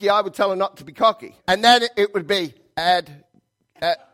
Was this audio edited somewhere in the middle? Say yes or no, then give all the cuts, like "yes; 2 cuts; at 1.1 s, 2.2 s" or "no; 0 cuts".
yes; 1 cut; at 1.4 s